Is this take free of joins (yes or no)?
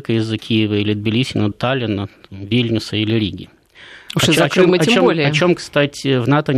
no